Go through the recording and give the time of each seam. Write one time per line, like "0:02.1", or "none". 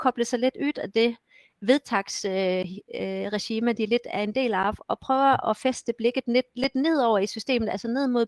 none